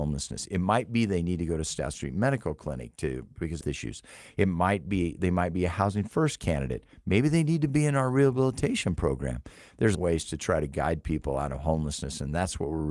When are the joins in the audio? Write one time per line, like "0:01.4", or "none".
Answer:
0:03.6
0:09.9